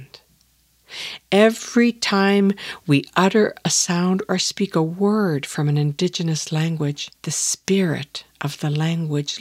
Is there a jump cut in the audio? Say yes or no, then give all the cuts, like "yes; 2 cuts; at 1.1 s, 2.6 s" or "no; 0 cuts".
yes; 1 cut; at 7.2 s